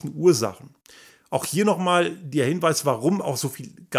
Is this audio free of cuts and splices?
yes; 0 cuts

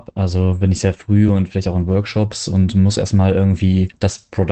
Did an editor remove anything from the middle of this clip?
no; 0 cuts

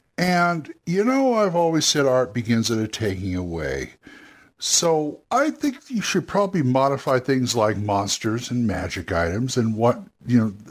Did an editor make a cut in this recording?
yes; 1 cut; at 5.2 s

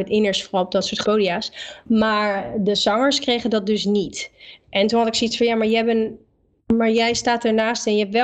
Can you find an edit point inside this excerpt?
yes; 1 cut; at 1.0 s

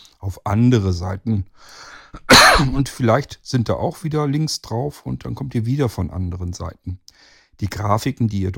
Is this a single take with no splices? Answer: yes; 0 cuts

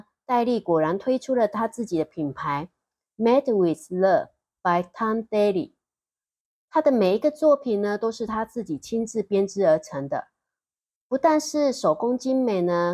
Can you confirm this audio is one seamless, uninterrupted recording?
yes; 0 cuts

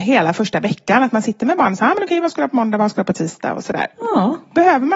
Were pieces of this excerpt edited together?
no; 0 cuts

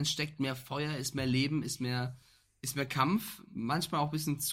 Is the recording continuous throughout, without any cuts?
yes; 0 cuts

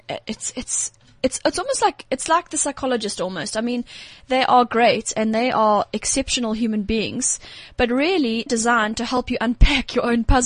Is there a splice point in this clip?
yes; 1 cut; at 8.5 s

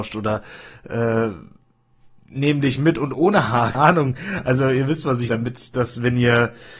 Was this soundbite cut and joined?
yes; 2 cuts; at 3.7 s, 5.3 s

